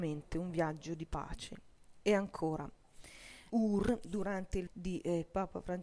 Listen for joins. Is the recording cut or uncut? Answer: cut